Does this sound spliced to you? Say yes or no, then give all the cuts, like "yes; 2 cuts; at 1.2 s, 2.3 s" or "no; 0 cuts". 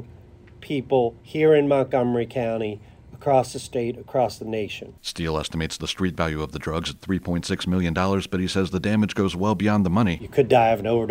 yes; 1 cut; at 1.2 s